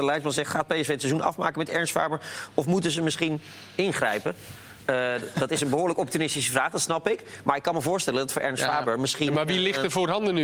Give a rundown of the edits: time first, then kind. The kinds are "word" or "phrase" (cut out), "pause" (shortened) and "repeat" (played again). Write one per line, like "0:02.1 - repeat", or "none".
none